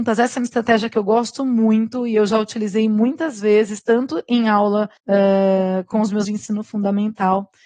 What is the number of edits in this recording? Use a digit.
2